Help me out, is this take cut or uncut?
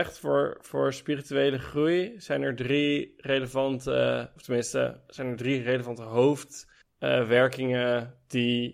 cut